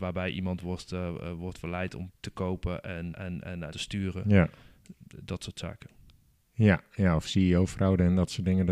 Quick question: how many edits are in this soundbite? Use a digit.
3